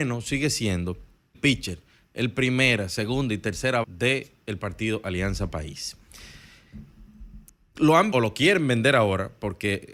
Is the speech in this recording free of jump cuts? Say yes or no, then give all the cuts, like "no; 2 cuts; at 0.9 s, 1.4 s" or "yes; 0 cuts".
no; 4 cuts; at 1.3 s, 3.8 s, 7.5 s, 8.1 s